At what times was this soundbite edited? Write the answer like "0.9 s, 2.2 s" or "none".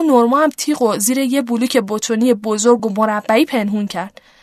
none